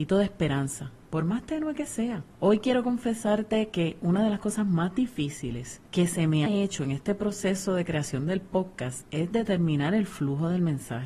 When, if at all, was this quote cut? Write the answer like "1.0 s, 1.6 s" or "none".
2.3 s, 5.9 s, 6.5 s